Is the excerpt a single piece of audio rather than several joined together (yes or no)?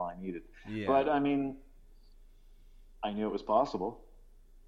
yes